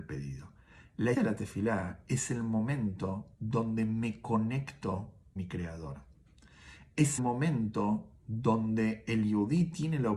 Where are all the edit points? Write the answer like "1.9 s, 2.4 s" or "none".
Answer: 1.1 s, 3.3 s, 5.4 s, 7.2 s